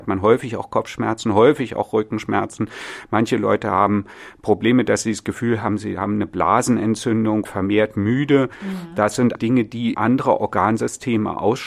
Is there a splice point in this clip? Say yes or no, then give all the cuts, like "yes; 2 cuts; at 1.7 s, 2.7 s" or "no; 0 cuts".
yes; 3 cuts; at 7.5 s, 9.4 s, 9.9 s